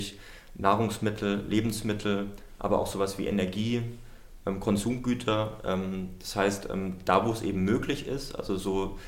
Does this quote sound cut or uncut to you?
uncut